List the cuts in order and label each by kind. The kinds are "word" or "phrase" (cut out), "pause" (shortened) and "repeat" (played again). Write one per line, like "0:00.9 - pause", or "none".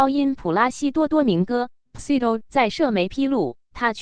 0:02.0 - phrase
0:02.4 - word